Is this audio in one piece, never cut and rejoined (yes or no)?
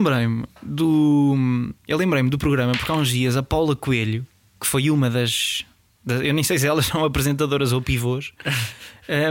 yes